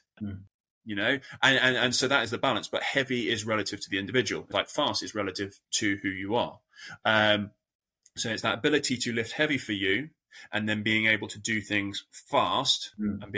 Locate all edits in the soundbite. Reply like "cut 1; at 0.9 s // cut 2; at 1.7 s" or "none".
cut 1; at 4.5 s // cut 2; at 5.7 s